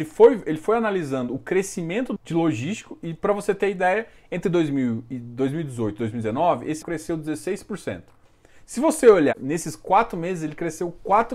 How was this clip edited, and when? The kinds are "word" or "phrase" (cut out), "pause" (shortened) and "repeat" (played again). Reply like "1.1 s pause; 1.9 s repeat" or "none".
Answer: 2.2 s word; 6.8 s word